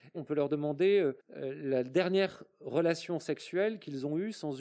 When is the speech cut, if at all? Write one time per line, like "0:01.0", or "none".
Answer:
0:01.2